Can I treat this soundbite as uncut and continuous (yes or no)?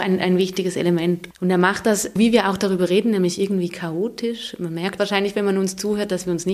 no